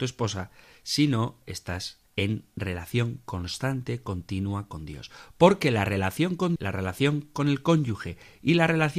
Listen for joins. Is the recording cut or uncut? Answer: cut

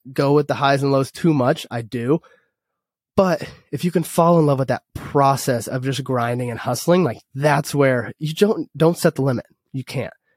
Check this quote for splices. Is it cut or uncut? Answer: uncut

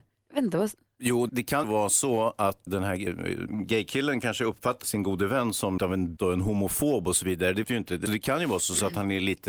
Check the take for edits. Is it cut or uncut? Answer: cut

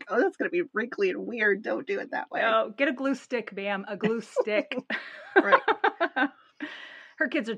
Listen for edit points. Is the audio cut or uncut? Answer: uncut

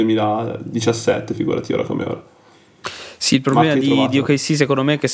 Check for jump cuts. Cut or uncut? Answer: uncut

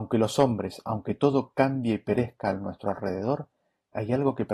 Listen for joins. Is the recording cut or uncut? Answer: uncut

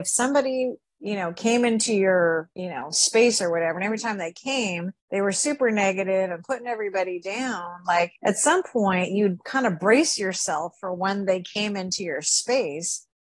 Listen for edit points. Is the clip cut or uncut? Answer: cut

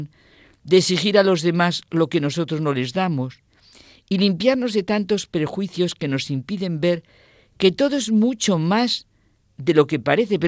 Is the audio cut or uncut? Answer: uncut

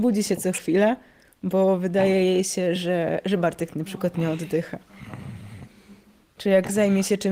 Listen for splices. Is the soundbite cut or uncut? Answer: uncut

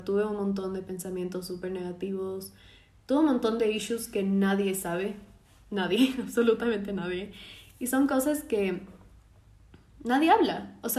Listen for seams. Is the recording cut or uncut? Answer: uncut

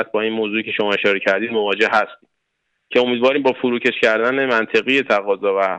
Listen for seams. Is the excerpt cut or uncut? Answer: uncut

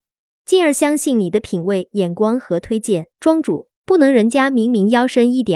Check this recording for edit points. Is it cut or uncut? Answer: cut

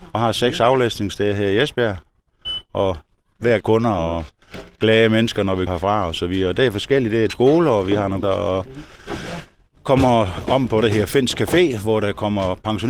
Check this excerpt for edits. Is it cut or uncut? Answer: cut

